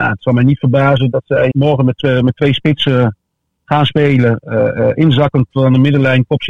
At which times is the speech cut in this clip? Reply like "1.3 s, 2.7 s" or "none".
1.5 s